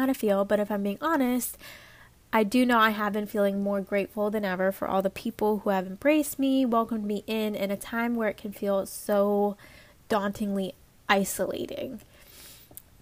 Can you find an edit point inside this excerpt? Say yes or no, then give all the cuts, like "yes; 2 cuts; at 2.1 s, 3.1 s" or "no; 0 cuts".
no; 0 cuts